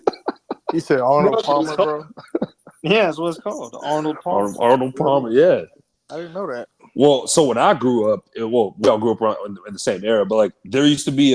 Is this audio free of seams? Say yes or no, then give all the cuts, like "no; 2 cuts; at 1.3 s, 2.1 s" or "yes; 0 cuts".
yes; 0 cuts